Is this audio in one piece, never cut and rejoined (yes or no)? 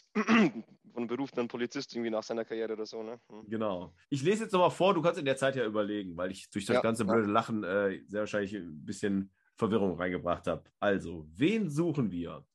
no